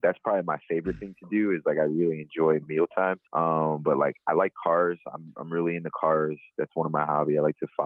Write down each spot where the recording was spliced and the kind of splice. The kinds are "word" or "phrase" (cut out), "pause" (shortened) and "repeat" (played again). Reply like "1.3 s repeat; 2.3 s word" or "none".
3.3 s pause